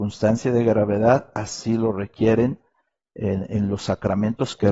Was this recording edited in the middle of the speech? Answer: no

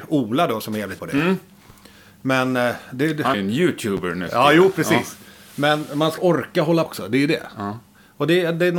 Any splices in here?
yes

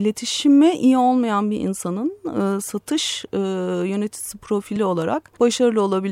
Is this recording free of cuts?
yes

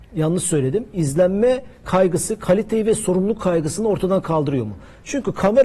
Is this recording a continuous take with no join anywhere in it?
yes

